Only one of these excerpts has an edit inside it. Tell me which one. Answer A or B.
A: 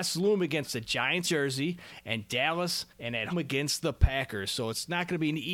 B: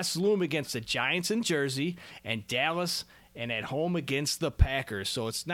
A